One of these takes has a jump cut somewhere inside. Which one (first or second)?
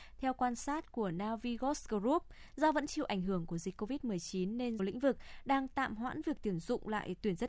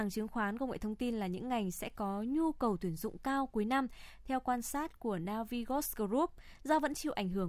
first